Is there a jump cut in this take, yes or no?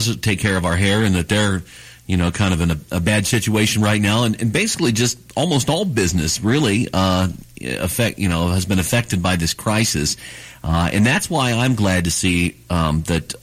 no